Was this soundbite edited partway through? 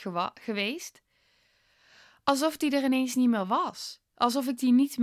no; 0 cuts

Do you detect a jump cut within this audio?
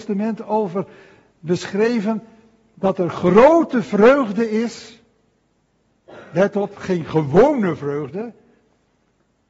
no; 0 cuts

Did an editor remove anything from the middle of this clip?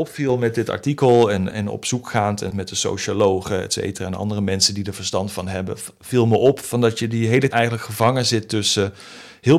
yes; 3 cuts; at 1.5 s, 2.5 s, 7.5 s

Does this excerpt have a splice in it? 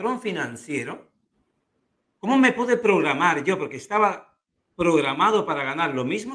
no; 0 cuts

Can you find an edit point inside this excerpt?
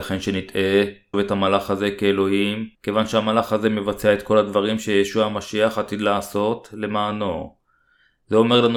yes; 2 cuts; at 1.1 s, 2.7 s

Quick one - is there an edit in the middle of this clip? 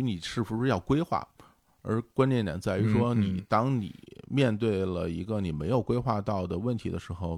no; 0 cuts

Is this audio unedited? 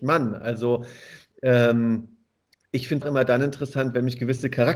no; 1 cut; at 3.0 s

